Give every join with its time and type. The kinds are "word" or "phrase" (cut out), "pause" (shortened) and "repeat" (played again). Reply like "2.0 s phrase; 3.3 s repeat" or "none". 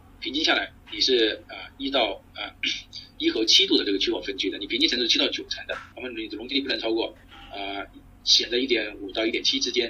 2.3 s pause; 5.9 s pause; 7.2 s pause